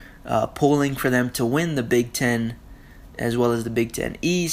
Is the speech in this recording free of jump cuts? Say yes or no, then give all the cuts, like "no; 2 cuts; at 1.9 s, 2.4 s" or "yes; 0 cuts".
yes; 0 cuts